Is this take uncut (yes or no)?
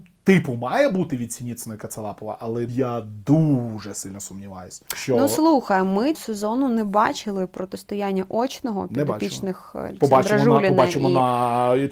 no